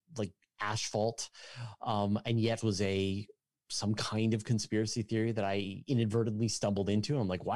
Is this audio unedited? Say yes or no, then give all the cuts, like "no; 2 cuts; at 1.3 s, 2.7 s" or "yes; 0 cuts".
no; 1 cut; at 2.6 s